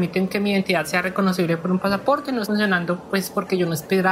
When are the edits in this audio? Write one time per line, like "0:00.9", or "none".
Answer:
0:02.4